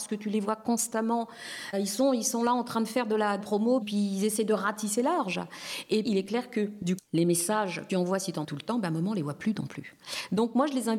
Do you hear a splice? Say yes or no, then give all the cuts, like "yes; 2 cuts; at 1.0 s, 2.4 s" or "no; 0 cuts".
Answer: yes; 7 cuts; at 1.7 s, 3.4 s, 3.8 s, 6.0 s, 7.0 s, 7.9 s, 8.4 s